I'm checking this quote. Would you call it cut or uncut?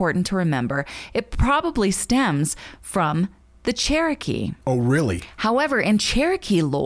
uncut